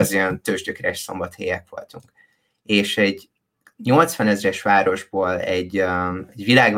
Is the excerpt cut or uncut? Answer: uncut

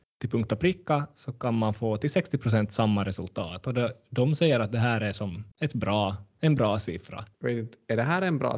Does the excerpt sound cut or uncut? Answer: cut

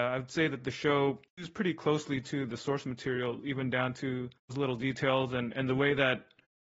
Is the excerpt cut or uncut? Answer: cut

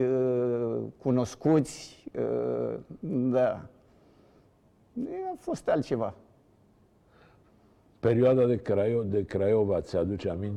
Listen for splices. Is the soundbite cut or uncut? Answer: uncut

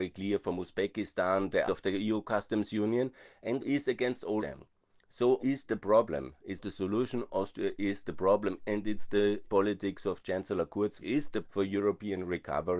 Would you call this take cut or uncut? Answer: cut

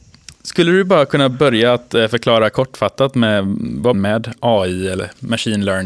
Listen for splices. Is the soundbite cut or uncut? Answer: cut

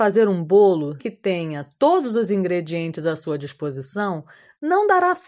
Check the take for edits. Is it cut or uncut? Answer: cut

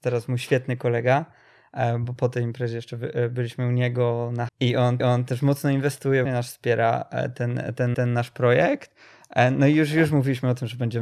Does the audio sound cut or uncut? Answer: cut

